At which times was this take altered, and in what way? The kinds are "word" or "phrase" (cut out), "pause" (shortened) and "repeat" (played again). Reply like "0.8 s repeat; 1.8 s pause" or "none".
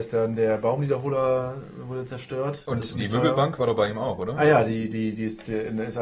2.9 s word

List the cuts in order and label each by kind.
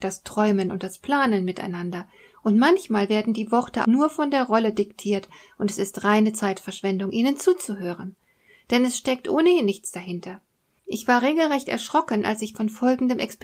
3.8 s word

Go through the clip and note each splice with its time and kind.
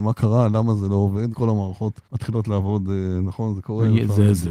1.3 s word; 2.0 s pause

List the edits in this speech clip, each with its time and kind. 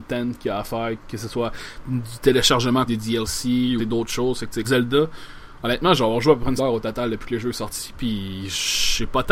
1.8 s word; 2.9 s word; 3.8 s word; 4.6 s word; 6.6 s word

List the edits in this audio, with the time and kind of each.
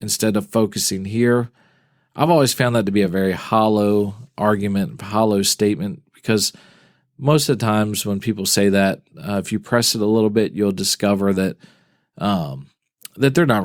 none

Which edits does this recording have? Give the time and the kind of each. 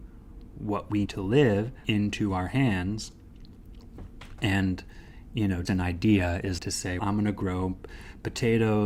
1.1 s word; 1.8 s word; 5.6 s word; 6.6 s word; 7.0 s word

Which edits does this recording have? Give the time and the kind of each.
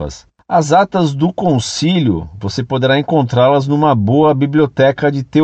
none

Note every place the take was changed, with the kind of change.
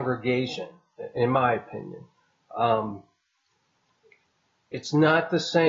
none

